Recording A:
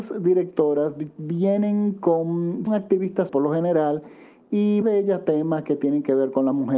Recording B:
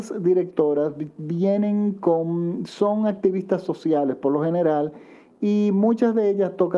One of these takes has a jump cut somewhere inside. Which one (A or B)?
A